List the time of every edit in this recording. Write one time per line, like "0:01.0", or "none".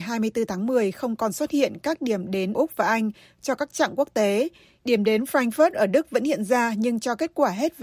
0:02.5